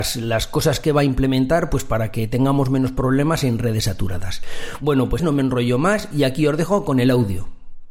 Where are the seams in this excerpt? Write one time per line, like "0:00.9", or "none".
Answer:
0:05.2